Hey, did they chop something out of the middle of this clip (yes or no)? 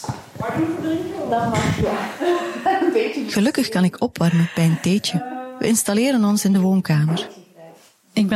no